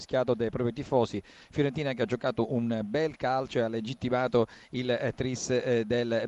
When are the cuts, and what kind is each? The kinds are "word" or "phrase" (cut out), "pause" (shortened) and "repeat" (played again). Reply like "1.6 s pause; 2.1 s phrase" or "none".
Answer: none